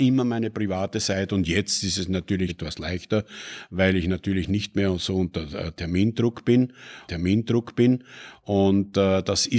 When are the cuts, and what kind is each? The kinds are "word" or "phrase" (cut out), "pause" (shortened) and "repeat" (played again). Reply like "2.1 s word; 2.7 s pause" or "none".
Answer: 2.5 s word; 7.1 s repeat

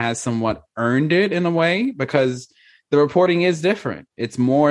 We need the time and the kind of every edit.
none

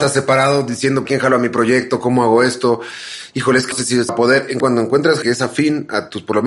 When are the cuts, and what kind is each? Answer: 1.0 s word; 3.7 s word; 4.1 s word; 4.6 s word; 5.2 s word

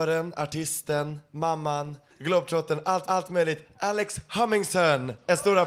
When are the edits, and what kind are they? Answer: 2.1 s word; 3.1 s repeat

